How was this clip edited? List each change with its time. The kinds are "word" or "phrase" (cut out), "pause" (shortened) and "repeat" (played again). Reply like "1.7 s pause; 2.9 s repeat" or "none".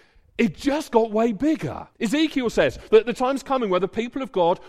1.9 s pause